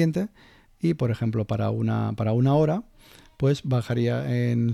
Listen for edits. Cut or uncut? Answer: uncut